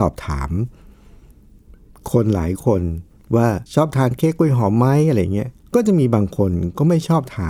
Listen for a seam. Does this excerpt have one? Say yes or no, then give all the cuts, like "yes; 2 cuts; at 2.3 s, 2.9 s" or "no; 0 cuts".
yes; 2 cuts; at 3.2 s, 3.7 s